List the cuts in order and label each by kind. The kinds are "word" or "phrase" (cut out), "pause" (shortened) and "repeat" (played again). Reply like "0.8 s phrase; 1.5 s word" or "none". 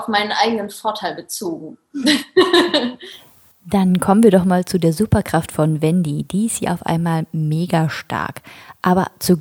none